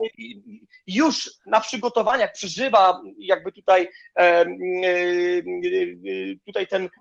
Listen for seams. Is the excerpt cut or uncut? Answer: uncut